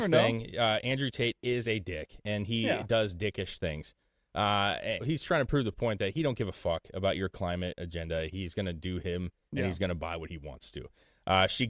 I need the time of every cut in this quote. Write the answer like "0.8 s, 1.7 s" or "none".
5.0 s